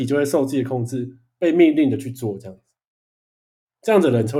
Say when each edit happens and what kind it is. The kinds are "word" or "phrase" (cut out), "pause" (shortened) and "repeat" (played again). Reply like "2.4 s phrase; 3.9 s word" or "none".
none